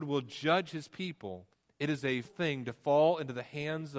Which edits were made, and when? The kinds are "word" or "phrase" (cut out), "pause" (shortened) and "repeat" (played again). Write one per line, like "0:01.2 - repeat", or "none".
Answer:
0:01.5 - pause
0:02.2 - word